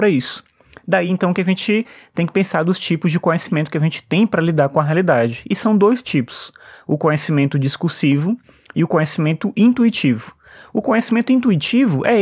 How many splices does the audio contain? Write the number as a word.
zero